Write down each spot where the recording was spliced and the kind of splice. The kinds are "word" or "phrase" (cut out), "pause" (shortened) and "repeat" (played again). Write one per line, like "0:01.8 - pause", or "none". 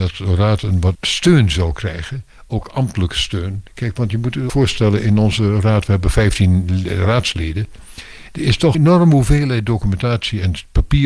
0:00.9 - word
0:03.7 - pause
0:04.5 - word
0:08.7 - word